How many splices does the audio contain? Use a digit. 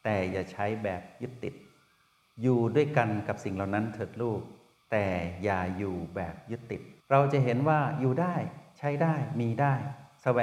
1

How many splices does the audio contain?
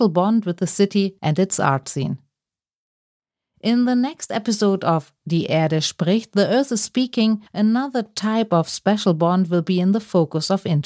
2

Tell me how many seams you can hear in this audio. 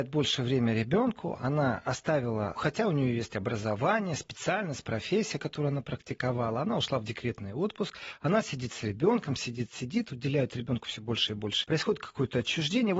3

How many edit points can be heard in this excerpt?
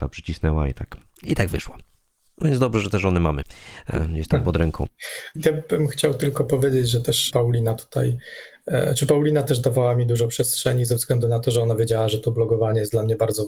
0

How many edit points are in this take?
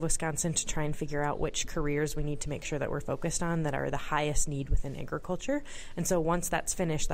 0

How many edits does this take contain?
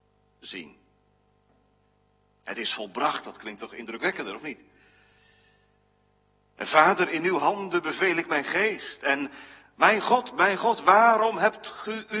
0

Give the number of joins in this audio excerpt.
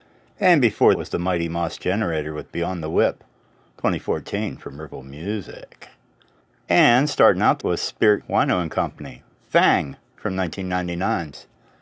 4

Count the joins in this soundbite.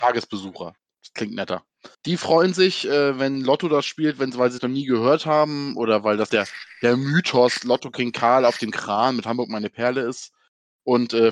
3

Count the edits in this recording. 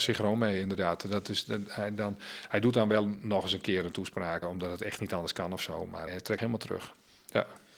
3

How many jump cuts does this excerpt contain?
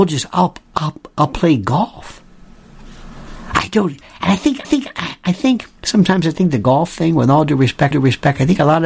3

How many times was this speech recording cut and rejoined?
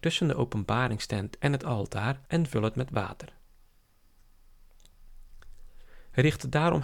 1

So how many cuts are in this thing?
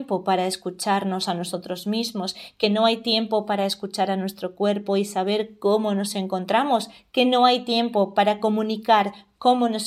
0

